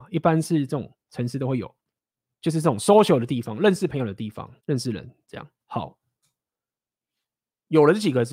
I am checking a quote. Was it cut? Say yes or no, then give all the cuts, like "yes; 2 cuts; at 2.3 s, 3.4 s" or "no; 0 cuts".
yes; 5 cuts; at 1.0 s, 2.0 s, 4.6 s, 5.2 s, 5.6 s